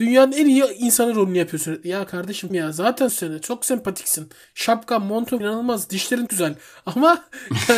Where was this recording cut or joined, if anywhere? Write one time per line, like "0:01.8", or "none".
0:02.5
0:03.1
0:05.4
0:06.3